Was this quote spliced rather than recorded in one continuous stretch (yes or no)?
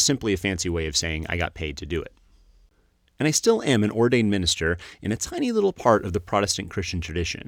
no